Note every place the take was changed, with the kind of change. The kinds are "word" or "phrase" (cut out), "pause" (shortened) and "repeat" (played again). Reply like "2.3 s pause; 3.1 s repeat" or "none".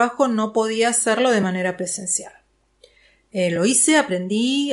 none